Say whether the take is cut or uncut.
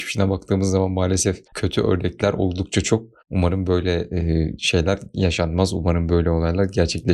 cut